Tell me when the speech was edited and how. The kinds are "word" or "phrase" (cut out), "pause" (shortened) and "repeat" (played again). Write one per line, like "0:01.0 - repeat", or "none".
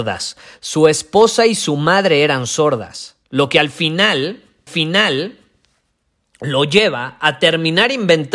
0:03.2 - pause
0:04.7 - repeat